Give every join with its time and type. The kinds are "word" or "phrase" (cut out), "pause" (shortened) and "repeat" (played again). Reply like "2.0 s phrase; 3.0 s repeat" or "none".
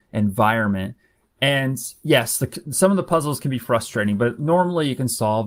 none